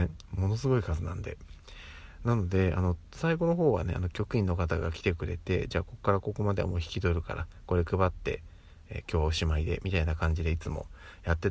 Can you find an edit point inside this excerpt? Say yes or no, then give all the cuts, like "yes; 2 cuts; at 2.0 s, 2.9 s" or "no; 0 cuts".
no; 0 cuts